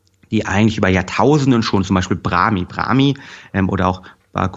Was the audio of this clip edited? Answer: no; 0 cuts

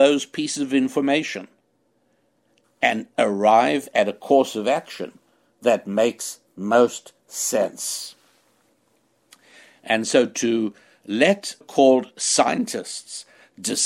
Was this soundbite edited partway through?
yes; 1 cut; at 11.6 s

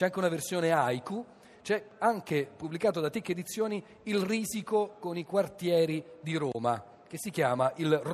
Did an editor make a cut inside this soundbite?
no; 0 cuts

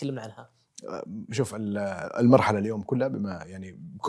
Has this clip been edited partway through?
no; 0 cuts

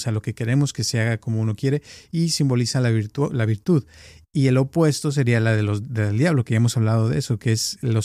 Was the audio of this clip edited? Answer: no; 0 cuts

